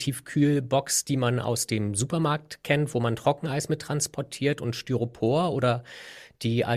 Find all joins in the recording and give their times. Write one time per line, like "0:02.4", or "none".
none